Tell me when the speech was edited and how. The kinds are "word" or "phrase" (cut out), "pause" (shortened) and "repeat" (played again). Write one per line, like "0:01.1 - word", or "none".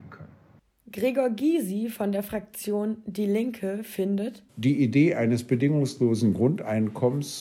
0:04.5 - pause